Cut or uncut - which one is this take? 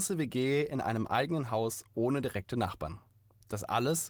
uncut